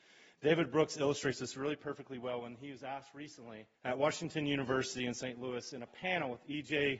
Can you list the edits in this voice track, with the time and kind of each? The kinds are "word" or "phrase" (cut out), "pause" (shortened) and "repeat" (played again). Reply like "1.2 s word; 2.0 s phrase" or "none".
3.7 s pause